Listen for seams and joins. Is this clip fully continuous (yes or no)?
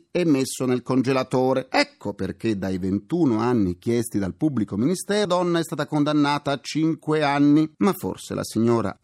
no